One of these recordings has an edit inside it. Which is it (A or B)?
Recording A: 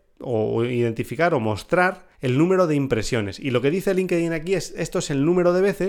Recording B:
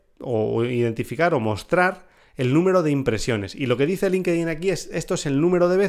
A